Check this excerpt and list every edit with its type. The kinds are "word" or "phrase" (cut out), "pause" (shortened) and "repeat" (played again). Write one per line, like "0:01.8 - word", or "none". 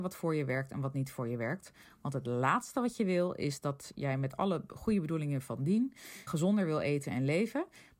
0:06.3 - word